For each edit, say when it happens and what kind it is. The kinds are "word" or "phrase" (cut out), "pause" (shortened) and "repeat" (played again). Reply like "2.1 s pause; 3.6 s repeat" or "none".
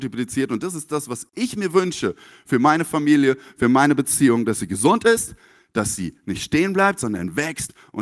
none